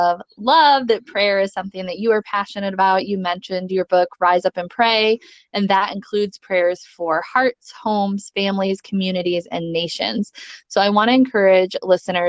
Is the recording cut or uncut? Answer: uncut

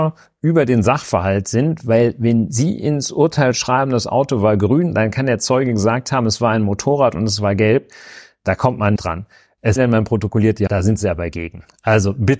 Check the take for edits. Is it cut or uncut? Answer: cut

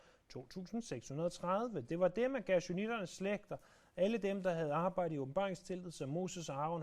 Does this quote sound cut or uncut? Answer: uncut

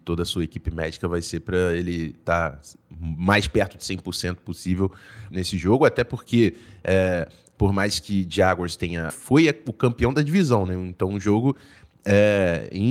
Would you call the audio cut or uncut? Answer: cut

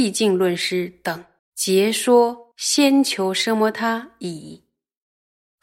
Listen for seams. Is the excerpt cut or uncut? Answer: cut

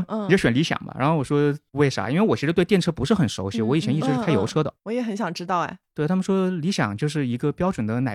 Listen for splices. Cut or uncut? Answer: cut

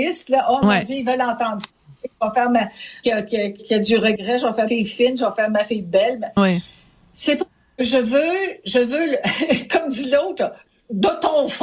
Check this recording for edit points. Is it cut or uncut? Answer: cut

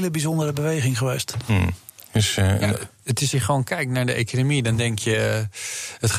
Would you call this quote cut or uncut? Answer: cut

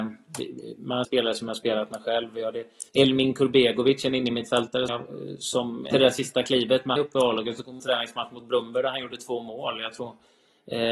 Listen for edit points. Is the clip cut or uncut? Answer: cut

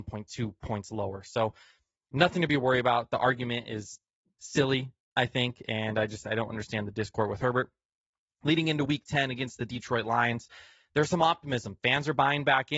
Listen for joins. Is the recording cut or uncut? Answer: uncut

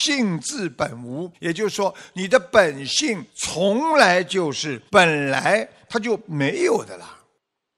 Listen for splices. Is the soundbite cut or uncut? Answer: cut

